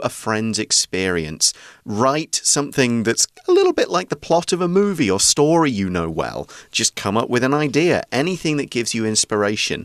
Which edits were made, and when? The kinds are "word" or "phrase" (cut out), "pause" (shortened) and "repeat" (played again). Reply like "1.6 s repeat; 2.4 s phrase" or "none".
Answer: none